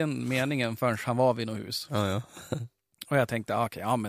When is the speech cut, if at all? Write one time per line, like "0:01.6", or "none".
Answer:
none